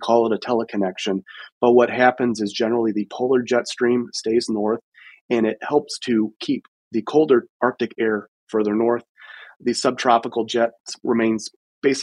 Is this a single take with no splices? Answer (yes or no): yes